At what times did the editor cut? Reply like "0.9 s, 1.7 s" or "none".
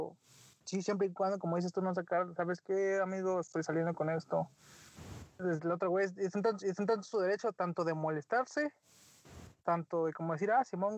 6.6 s